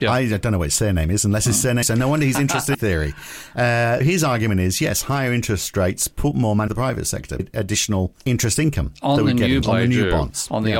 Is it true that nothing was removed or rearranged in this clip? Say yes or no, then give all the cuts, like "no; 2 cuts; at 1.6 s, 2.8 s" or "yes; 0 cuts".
no; 7 cuts; at 1.8 s, 2.7 s, 4.0 s, 6.7 s, 7.4 s, 8.2 s, 9.6 s